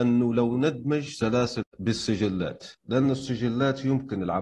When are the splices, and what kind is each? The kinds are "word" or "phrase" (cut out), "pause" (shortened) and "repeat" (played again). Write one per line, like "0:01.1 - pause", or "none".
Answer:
0:01.6 - word
0:02.7 - pause

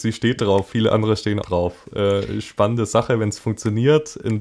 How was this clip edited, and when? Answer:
0:01.4 - word

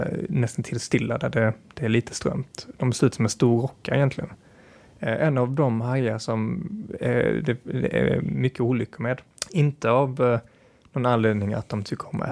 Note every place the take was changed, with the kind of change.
none

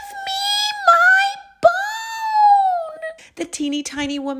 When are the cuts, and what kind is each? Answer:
0:03.2 - pause

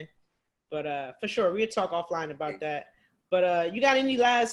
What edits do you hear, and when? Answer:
none

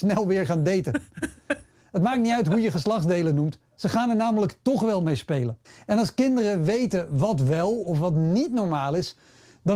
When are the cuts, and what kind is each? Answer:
0:05.6 - pause

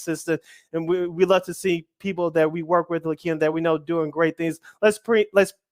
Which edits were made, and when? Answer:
none

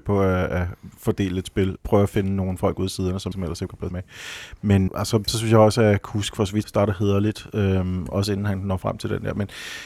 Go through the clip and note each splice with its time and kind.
0:01.8 - word
0:03.3 - word
0:03.9 - word
0:04.9 - word
0:06.6 - word

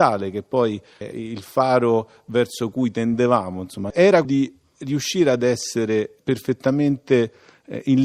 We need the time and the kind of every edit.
0:01.1 - word
0:04.2 - word

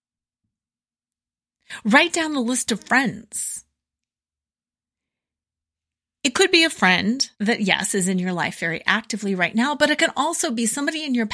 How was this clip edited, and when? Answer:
0:07.3 - pause

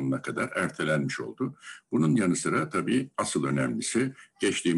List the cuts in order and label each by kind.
0:03.1 - pause

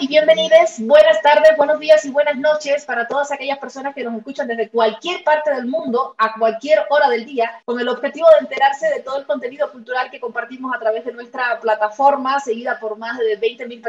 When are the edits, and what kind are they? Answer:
0:07.6 - pause

